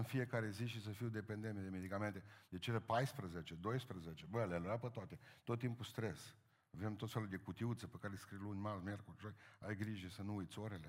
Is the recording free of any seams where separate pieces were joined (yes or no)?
yes